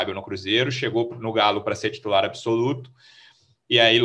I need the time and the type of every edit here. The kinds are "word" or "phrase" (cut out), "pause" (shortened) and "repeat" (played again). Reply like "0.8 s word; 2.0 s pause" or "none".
none